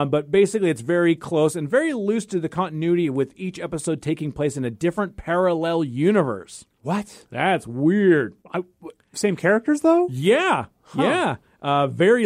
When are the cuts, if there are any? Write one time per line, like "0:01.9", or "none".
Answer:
0:08.4